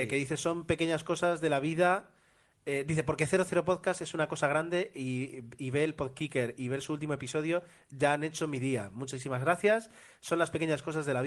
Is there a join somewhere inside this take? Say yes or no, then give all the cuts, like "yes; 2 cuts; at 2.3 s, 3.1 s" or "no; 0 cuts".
no; 0 cuts